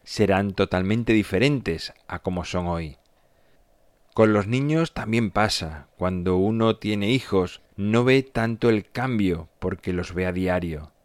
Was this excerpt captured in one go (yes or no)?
no